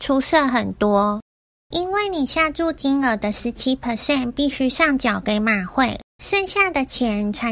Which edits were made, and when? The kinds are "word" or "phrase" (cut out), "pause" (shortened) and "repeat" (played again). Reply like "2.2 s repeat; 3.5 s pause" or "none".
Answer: 6.1 s pause

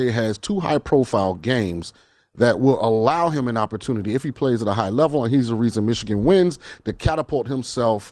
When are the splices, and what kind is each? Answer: none

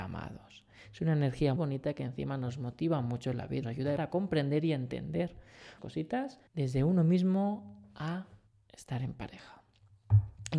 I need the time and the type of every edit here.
1.6 s word; 3.6 s word; 4.0 s word; 5.8 s word; 6.5 s pause; 8.5 s pause

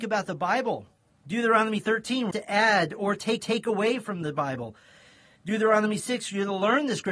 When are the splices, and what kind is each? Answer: 1.1 s pause; 2.3 s word; 3.4 s repeat

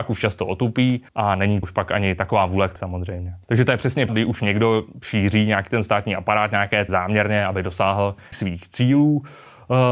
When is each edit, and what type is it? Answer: 1.1 s pause; 1.6 s word; 2.8 s word; 3.4 s pause; 4.1 s word; 6.9 s word; 8.3 s word

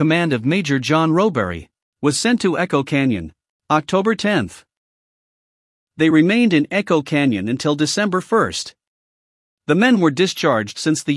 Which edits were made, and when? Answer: none

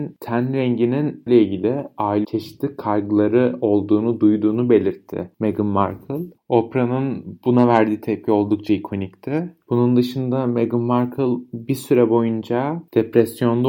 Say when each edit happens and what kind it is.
1.3 s phrase; 2.2 s word

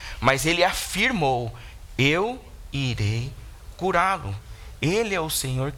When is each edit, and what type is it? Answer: none

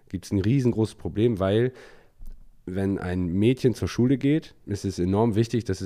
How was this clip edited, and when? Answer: 4.6 s phrase

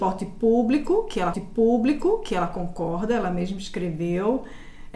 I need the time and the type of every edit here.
1.3 s repeat

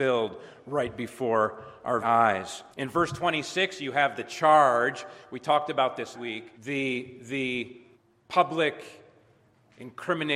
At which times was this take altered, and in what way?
2.0 s word; 2.7 s pause; 6.1 s word; 6.5 s pause; 7.9 s pause

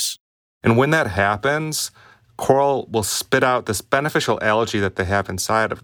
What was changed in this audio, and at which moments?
none

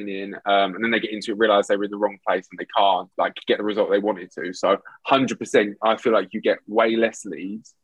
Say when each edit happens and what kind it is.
3.1 s pause

